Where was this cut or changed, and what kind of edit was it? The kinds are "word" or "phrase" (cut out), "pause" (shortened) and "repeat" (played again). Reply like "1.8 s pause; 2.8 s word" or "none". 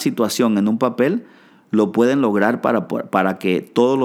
none